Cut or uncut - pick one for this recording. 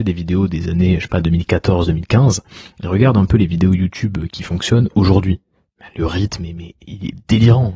uncut